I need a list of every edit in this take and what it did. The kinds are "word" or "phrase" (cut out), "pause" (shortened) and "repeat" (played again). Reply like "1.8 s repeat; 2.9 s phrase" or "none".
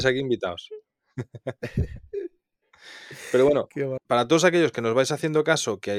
4.0 s word